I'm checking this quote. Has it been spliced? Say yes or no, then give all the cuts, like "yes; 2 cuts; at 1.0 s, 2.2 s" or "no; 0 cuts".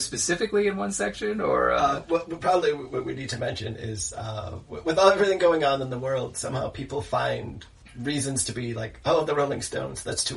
no; 0 cuts